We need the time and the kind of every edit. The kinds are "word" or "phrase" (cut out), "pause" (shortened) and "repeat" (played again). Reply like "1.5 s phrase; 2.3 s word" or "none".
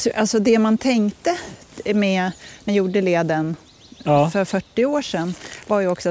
2.7 s word